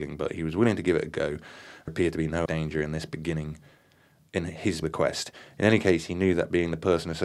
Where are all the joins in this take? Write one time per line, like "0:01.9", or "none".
0:01.9
0:02.5
0:04.8